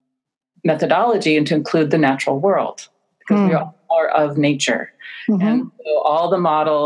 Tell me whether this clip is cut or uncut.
uncut